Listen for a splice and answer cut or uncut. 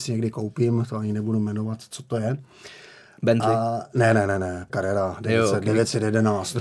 cut